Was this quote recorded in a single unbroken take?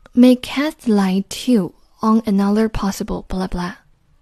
yes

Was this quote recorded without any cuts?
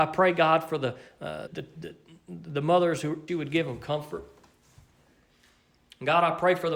no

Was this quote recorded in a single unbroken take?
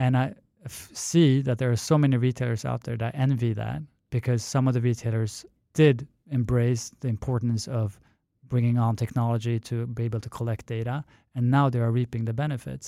no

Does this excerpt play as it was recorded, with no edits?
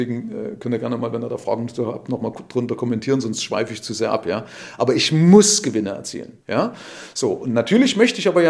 no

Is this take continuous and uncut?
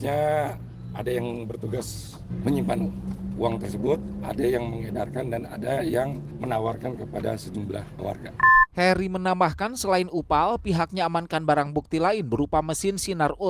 yes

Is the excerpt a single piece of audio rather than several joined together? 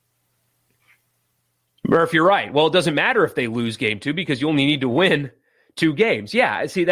yes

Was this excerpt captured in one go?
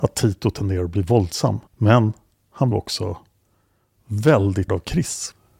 no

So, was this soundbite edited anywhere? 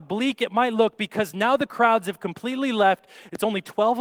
no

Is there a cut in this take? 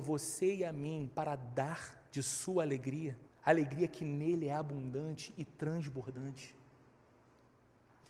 yes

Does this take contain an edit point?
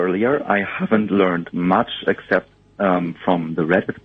no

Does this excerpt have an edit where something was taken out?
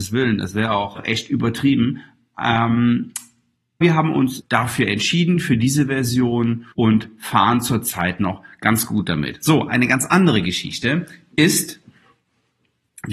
yes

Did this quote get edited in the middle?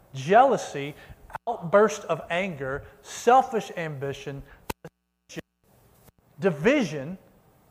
no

